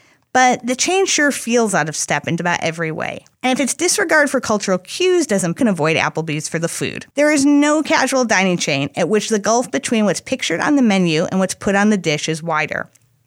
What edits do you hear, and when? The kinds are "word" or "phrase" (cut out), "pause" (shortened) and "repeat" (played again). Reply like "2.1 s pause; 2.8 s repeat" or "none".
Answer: 2.4 s word; 3.3 s pause; 5.6 s phrase; 7.1 s pause